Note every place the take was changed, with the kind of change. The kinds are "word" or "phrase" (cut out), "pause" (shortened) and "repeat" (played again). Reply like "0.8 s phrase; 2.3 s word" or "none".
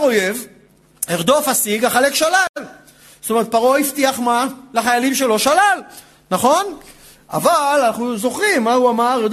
none